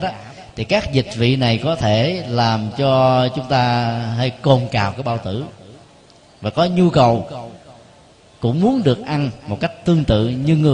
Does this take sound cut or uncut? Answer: uncut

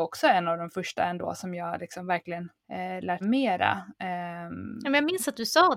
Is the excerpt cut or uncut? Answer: cut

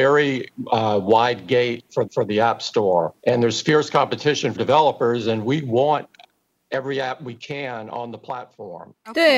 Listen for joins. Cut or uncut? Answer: cut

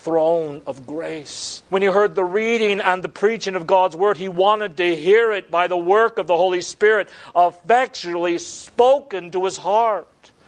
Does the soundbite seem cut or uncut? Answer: cut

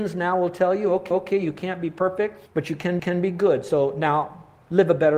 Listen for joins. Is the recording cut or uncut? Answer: cut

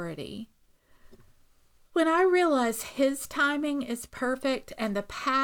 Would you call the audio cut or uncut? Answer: uncut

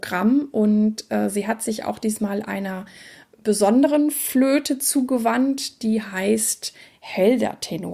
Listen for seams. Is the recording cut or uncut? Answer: uncut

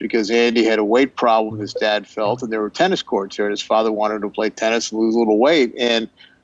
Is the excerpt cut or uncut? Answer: uncut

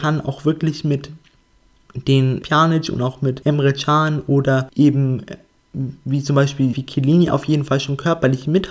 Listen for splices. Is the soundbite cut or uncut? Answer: cut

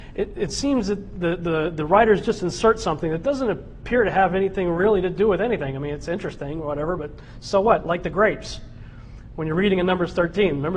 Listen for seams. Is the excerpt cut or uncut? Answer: uncut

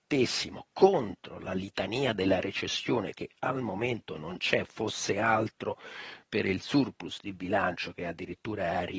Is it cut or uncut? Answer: uncut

